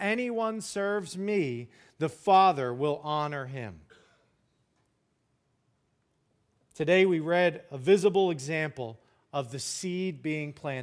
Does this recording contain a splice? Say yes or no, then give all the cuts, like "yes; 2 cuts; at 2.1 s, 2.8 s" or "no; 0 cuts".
no; 0 cuts